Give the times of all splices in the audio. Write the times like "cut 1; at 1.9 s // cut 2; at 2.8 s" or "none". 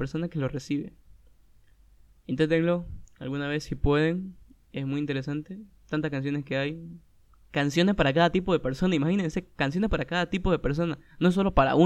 none